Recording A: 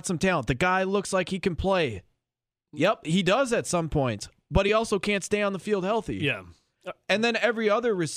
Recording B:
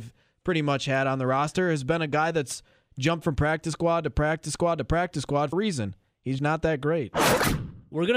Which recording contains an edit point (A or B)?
B